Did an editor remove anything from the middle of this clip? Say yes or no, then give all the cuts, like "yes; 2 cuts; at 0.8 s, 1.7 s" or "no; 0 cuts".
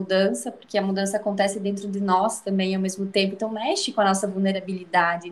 no; 0 cuts